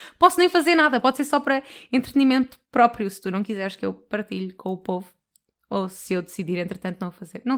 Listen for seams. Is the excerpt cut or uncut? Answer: uncut